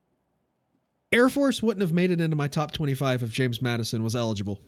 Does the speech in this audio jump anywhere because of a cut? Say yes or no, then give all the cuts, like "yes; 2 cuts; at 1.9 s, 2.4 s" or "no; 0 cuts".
no; 0 cuts